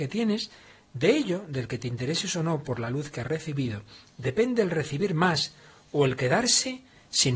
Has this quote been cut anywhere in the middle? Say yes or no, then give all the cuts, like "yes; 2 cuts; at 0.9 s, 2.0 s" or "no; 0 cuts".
no; 0 cuts